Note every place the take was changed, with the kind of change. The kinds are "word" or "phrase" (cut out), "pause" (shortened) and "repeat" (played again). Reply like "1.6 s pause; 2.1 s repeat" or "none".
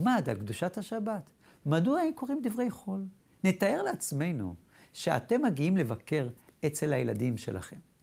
none